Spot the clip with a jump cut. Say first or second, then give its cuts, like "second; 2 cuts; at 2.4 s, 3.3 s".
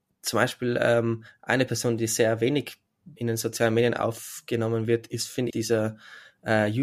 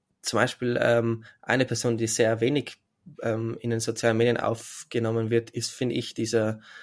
first; 2 cuts; at 3.2 s, 5.5 s